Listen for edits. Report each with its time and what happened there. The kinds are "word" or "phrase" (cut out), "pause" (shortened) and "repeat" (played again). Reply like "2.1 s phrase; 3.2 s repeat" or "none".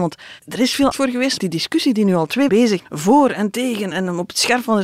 0.9 s word; 1.4 s word; 2.5 s word; 2.8 s word; 3.9 s word

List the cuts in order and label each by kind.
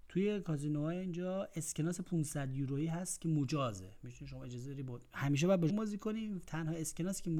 5.7 s word

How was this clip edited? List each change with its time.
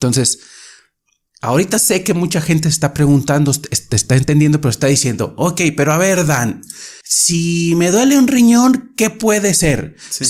7.0 s pause

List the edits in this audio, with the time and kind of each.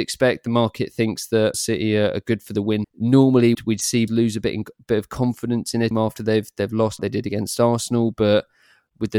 1.5 s word; 2.8 s word; 3.5 s word; 4.1 s word; 5.9 s word; 7.0 s word

